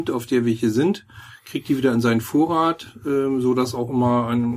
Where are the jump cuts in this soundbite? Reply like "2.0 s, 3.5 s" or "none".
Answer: none